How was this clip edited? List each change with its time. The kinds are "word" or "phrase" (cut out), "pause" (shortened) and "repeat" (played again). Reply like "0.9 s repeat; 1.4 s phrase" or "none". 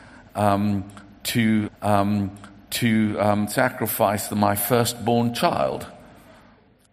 1.7 s repeat